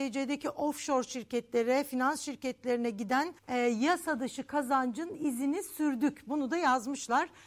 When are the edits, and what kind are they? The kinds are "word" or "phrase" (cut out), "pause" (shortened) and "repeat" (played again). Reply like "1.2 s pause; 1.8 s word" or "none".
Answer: 3.4 s pause